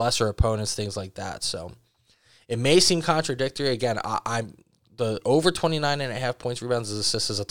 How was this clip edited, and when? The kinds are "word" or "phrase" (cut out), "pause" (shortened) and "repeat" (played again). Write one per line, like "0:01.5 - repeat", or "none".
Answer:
none